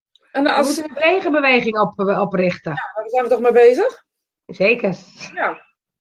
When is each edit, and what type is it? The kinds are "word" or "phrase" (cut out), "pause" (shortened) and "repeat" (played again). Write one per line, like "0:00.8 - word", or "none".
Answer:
none